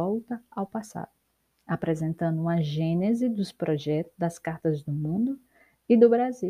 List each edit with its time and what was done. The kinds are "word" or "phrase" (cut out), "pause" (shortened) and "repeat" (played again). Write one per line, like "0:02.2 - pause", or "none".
none